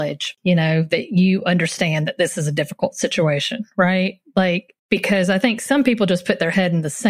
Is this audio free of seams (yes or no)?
no